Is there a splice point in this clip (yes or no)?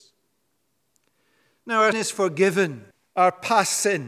yes